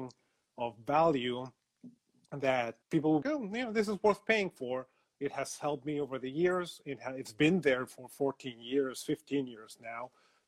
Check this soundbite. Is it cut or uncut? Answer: cut